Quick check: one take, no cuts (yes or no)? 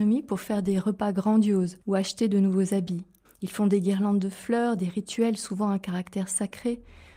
no